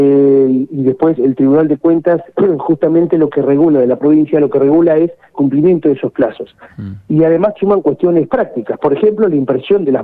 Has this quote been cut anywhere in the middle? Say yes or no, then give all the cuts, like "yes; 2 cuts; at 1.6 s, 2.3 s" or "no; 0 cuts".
yes; 3 cuts; at 1.2 s, 5.3 s, 7.6 s